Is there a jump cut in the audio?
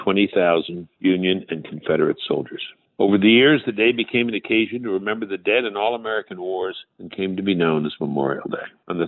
no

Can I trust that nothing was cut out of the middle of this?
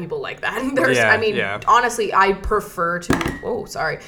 yes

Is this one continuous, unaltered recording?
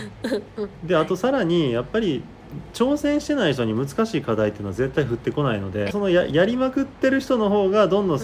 no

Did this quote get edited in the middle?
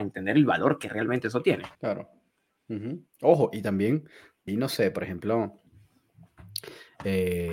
yes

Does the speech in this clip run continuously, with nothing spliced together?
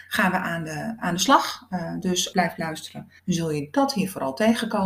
no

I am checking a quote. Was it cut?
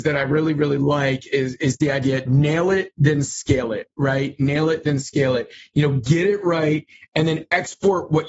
no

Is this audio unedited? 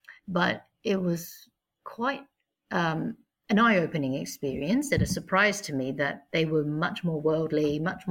yes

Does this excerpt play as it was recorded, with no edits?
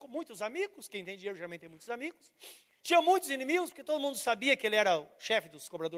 yes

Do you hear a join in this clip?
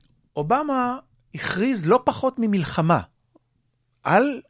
no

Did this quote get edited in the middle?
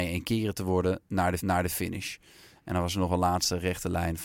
yes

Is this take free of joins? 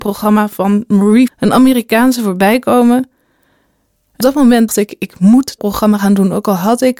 no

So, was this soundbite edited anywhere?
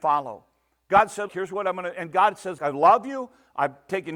yes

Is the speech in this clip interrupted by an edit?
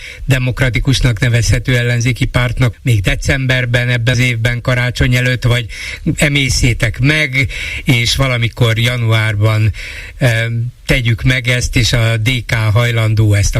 yes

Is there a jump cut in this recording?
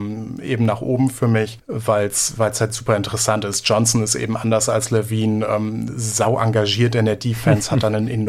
no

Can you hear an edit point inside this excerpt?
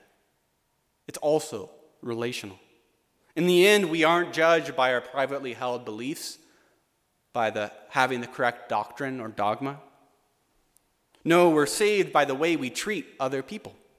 no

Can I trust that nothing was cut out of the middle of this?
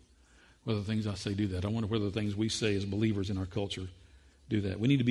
yes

